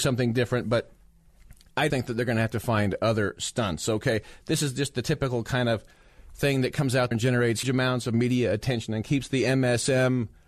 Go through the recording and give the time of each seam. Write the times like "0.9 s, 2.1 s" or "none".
1.9 s, 7.1 s, 7.6 s